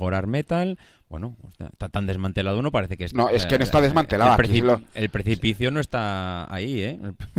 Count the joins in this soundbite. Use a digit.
1